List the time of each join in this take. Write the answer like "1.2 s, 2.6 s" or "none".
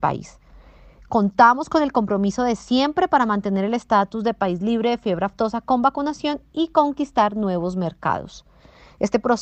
none